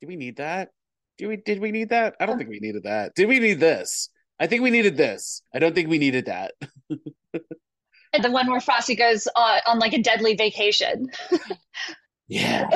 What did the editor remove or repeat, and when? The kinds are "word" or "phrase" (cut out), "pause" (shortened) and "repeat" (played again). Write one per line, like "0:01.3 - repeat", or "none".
0:05.5 - pause
0:08.2 - phrase